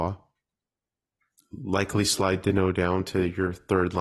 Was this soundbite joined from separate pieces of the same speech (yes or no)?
no